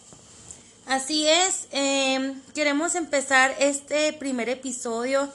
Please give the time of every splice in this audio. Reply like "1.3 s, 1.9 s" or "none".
none